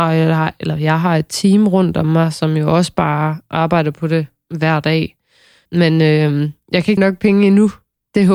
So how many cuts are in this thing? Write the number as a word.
one